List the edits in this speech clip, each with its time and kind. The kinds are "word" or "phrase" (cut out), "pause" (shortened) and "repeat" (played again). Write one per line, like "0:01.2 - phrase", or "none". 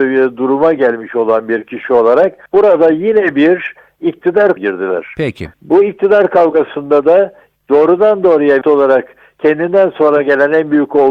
0:02.5 - pause
0:04.6 - word
0:05.5 - pause
0:08.6 - word